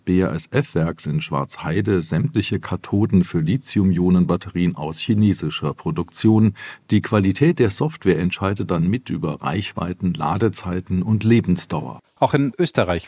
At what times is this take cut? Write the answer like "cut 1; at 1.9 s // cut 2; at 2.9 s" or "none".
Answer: none